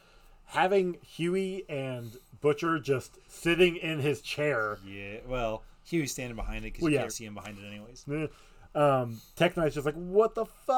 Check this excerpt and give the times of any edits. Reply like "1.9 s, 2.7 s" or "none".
7.1 s